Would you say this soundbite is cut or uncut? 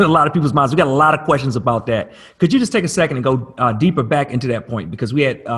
uncut